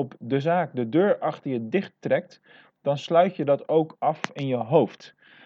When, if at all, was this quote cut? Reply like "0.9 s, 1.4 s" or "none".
none